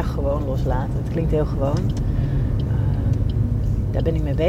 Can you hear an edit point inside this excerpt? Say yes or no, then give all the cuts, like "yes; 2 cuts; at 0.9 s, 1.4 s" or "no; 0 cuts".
no; 0 cuts